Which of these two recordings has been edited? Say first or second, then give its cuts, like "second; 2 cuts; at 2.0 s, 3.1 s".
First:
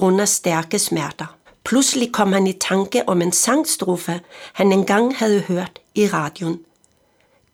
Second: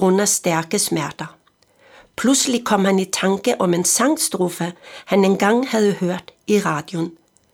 first; 1 cut; at 1.5 s